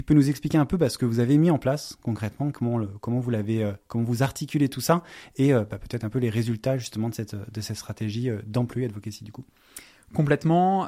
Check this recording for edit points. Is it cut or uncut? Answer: uncut